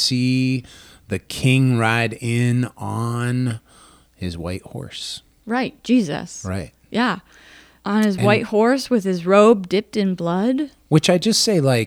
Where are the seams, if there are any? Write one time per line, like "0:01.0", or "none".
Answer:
none